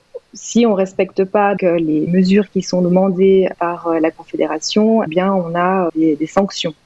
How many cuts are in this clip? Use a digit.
5